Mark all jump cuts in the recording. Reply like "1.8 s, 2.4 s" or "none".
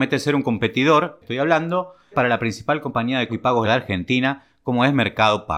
1.2 s, 2.1 s, 3.3 s, 3.6 s

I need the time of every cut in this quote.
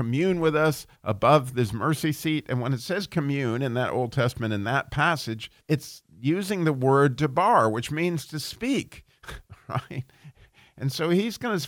0.9 s, 5.6 s

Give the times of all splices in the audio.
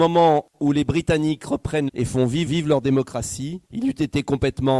1.9 s, 2.5 s, 3.6 s

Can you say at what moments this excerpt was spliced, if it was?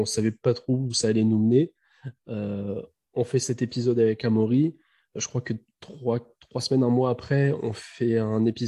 none

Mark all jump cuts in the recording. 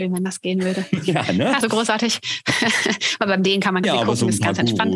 1.6 s, 3.8 s

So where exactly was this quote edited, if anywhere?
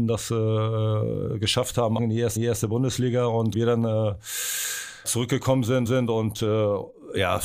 2.0 s, 2.4 s, 3.5 s, 5.0 s, 5.9 s

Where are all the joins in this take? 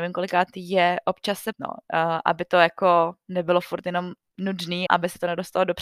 1.5 s, 4.9 s

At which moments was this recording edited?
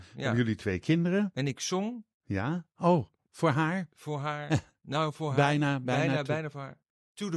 2.1 s

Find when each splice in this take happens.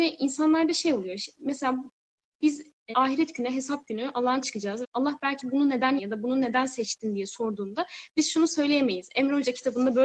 2.9 s, 4.4 s, 4.8 s, 6.0 s

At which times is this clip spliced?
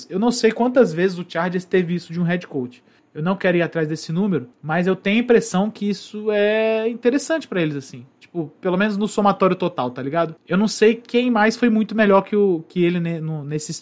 3.0 s, 4.5 s, 10.4 s

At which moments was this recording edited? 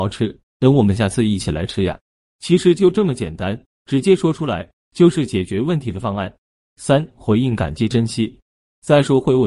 none

